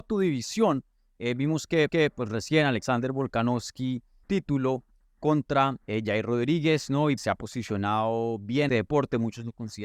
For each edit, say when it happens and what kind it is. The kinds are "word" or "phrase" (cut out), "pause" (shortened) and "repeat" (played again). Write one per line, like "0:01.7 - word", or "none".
0:01.9 - repeat
0:04.2 - phrase
0:05.8 - pause
0:07.2 - word
0:08.7 - phrase